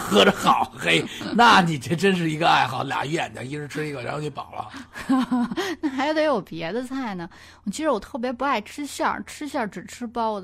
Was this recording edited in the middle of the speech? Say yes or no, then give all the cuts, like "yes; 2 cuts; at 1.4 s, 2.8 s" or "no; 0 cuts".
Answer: no; 0 cuts